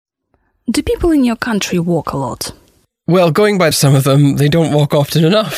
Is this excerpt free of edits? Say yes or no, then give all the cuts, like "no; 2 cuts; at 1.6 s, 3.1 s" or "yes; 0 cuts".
no; 1 cut; at 3.7 s